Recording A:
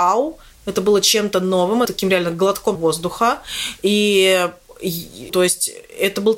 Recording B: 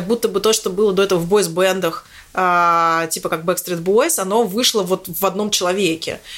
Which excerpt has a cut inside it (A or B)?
A